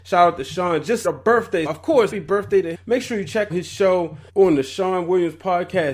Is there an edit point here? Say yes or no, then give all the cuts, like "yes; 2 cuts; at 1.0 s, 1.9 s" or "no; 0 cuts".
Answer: yes; 6 cuts; at 1.0 s, 1.7 s, 2.1 s, 2.7 s, 3.5 s, 4.3 s